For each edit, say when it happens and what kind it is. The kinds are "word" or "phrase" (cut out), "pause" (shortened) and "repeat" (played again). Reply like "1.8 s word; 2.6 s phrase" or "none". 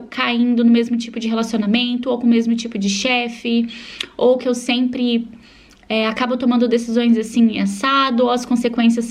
none